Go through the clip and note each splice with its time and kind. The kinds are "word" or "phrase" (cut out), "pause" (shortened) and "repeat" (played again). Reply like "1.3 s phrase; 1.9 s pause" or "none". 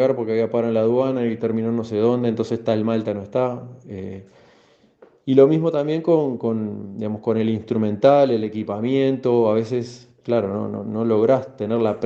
none